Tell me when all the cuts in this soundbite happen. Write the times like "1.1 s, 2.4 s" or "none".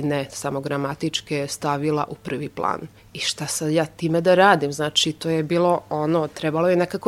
3.0 s

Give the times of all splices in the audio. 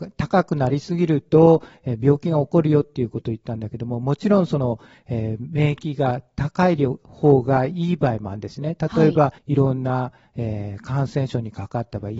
9.4 s

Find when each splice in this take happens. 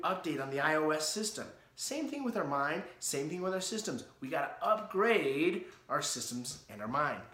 none

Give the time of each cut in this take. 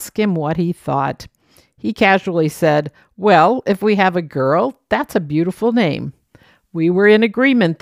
none

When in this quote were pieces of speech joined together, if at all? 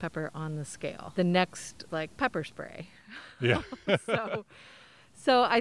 1.9 s

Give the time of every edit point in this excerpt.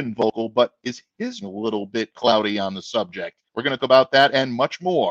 1.4 s, 3.5 s, 3.8 s

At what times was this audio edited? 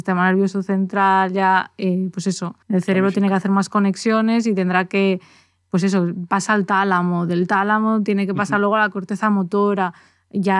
2.6 s

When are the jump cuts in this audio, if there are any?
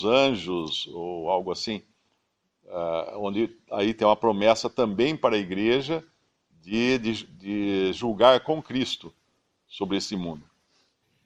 none

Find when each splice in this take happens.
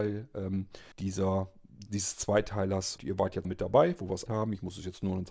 0.9 s, 3.0 s, 3.4 s, 4.3 s

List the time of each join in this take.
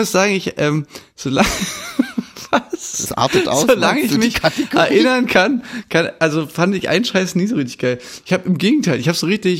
none

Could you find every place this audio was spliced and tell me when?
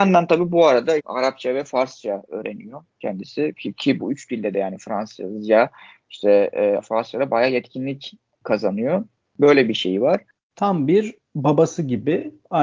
1.0 s, 4.0 s, 6.8 s

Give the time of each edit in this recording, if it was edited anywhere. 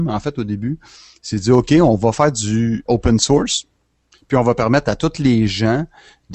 2.9 s

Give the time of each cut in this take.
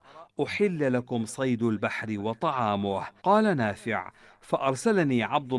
3.2 s

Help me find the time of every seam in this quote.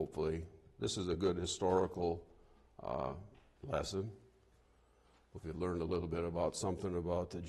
none

